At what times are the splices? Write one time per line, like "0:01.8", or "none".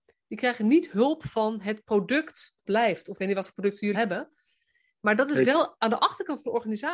0:02.6
0:03.2
0:03.9